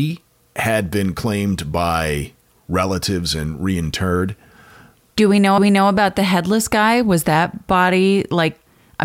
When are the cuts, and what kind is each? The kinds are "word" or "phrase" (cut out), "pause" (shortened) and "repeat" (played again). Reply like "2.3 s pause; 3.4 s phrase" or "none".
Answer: 5.6 s repeat